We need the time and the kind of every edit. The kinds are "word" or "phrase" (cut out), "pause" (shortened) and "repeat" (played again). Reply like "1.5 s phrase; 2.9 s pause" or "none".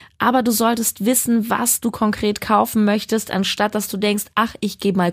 none